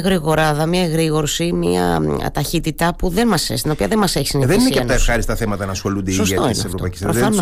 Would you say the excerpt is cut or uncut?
uncut